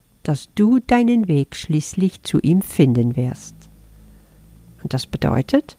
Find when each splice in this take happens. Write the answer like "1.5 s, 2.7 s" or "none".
none